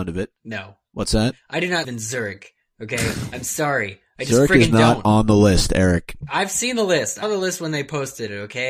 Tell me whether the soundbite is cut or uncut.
cut